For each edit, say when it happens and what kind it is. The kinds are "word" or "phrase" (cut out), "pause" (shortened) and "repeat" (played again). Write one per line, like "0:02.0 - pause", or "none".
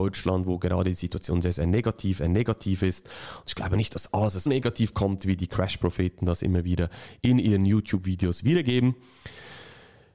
0:02.2 - repeat
0:04.5 - word